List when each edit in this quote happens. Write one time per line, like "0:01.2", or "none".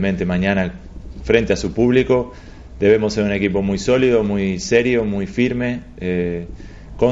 none